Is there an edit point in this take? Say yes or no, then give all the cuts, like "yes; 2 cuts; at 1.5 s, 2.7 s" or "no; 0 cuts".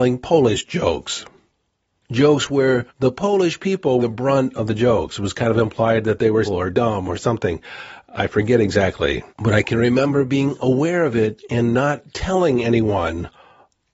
yes; 4 cuts; at 2.9 s, 4.0 s, 6.4 s, 9.3 s